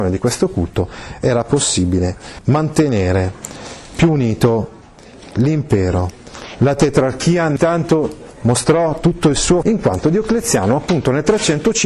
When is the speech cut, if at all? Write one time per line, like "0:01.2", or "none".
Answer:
0:09.6